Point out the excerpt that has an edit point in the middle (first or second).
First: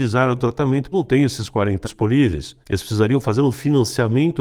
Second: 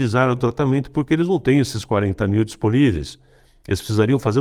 first